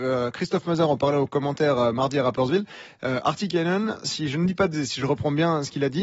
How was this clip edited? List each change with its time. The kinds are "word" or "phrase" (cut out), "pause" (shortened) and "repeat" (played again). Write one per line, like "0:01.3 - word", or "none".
0:04.7 - word